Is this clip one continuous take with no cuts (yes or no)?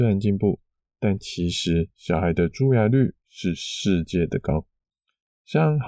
yes